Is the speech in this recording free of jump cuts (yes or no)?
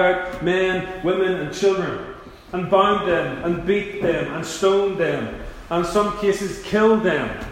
yes